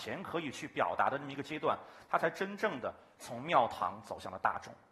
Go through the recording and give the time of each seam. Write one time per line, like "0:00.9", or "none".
none